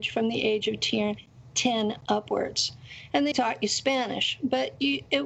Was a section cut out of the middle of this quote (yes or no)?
yes